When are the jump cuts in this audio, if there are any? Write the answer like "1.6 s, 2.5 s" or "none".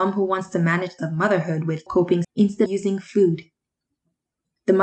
1.0 s, 1.9 s, 2.2 s, 2.7 s